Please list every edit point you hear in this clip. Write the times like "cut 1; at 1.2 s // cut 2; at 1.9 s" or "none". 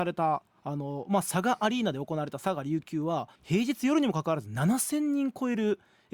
cut 1; at 3.3 s